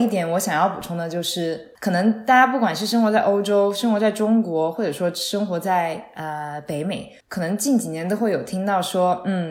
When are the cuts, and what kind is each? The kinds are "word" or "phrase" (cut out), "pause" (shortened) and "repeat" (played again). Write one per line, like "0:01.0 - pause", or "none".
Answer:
0:07.2 - pause

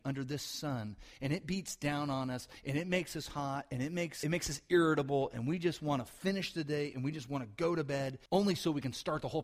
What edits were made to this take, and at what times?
0:04.2 - phrase
0:08.3 - pause

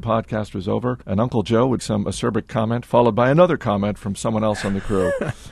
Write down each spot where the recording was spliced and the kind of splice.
0:01.0 - pause
0:01.8 - word

